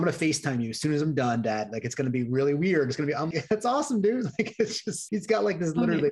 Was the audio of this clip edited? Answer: yes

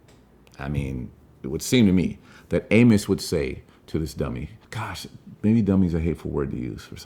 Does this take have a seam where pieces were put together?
yes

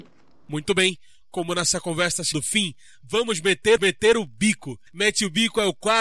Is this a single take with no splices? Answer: no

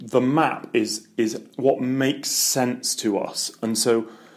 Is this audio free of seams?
yes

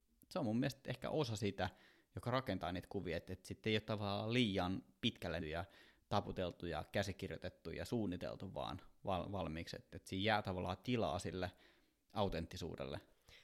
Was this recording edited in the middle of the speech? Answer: yes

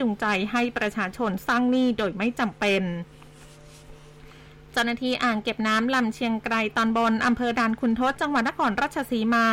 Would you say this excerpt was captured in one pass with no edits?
yes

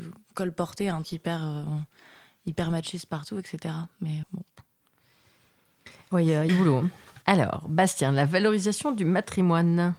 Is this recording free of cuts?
no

